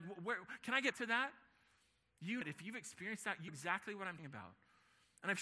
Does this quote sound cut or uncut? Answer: cut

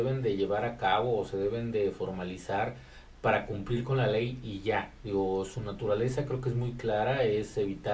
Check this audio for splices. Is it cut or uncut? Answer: uncut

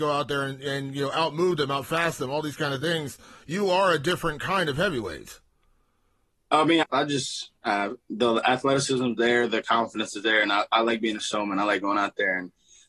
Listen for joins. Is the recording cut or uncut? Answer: cut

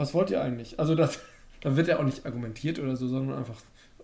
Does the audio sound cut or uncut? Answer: uncut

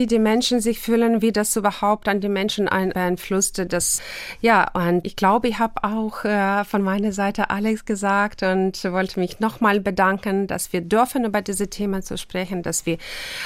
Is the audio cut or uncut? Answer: uncut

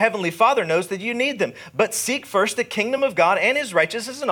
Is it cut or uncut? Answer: uncut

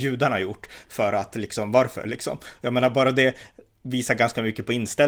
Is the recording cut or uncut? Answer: uncut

